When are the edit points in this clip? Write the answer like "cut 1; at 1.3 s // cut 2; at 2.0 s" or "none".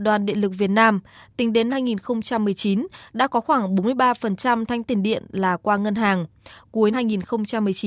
cut 1; at 1.7 s // cut 2; at 4.8 s // cut 3; at 6.9 s

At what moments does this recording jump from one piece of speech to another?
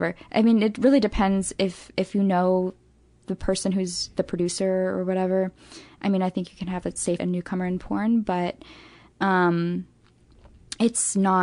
cut 1; at 7.2 s

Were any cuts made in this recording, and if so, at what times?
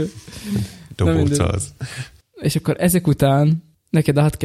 none

